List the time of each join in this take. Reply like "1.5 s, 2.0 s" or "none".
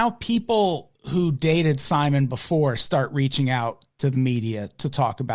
1.0 s